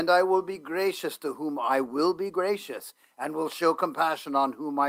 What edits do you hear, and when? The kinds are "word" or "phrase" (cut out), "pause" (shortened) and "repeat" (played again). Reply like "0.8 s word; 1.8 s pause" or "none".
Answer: none